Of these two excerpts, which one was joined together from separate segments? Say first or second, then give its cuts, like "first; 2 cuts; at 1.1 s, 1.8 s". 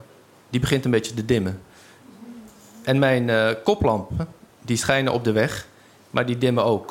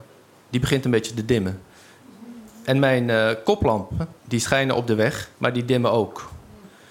second; 3 cuts; at 2.5 s, 4.2 s, 5.3 s